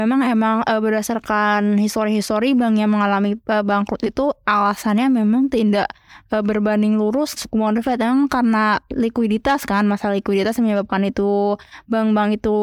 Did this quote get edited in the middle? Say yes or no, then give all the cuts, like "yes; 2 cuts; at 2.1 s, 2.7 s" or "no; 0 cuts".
yes; 1 cut; at 7.4 s